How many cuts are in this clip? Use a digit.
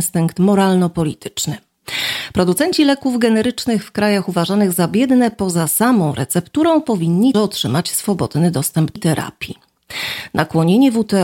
2